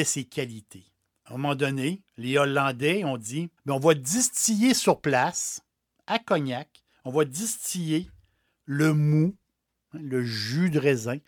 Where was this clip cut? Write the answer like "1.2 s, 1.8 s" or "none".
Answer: 3.6 s